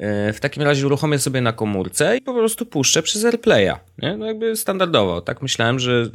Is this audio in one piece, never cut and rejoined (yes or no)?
no